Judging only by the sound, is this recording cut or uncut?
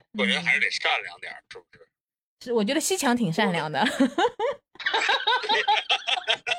uncut